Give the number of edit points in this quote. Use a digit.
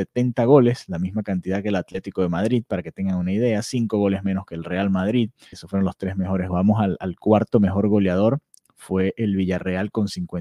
2